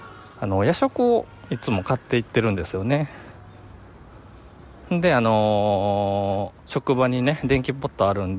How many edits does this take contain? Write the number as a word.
one